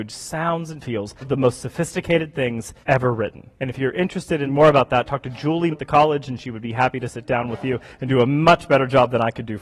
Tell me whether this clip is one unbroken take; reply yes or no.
no